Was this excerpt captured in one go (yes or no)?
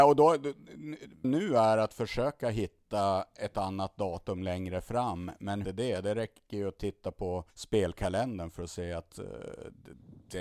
no